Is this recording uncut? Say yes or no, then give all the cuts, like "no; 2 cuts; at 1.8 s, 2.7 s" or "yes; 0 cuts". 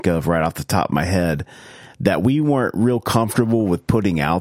yes; 0 cuts